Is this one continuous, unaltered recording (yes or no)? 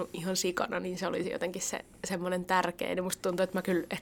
yes